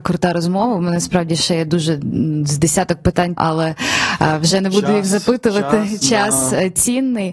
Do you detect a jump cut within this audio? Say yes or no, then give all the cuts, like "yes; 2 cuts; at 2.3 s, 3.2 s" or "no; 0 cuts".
yes; 1 cut; at 3.4 s